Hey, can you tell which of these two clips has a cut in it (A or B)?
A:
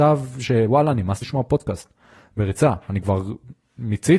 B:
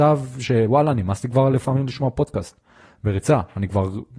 A